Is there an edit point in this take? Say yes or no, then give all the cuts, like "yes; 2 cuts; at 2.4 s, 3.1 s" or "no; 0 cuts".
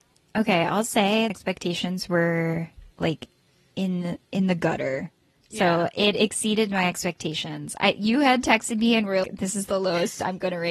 yes; 3 cuts; at 1.3 s, 2.9 s, 9.2 s